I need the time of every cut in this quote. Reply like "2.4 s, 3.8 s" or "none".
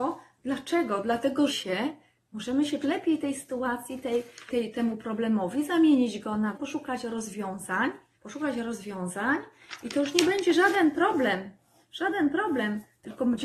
1.5 s, 2.8 s, 4.5 s, 6.5 s, 8.1 s